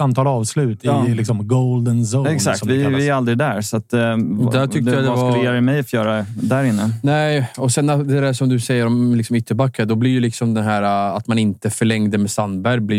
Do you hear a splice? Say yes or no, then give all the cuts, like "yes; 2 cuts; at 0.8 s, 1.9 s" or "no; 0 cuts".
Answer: no; 0 cuts